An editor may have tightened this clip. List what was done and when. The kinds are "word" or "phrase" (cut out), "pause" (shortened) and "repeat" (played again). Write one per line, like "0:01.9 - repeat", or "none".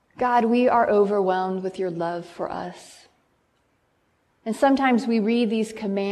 none